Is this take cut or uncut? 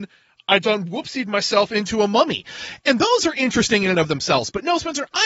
uncut